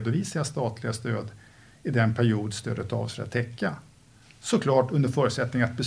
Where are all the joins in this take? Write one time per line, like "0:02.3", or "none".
none